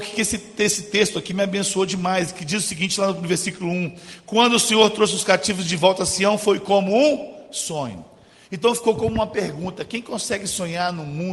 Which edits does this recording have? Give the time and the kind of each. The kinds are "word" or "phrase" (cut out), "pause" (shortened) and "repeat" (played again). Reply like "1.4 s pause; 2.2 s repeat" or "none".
none